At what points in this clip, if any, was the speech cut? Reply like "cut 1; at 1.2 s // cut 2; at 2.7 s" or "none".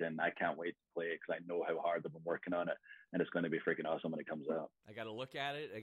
none